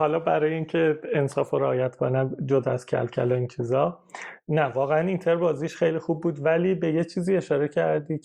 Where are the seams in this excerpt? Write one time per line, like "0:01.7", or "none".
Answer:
none